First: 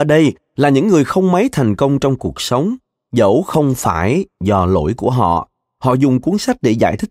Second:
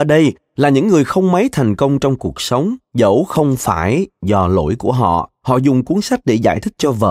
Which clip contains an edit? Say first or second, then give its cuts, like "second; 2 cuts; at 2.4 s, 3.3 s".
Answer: second; 2 cuts; at 2.8 s, 5.3 s